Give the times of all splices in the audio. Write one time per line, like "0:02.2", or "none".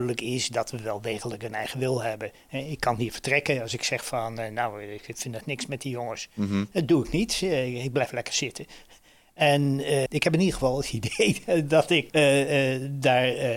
0:10.1
0:12.1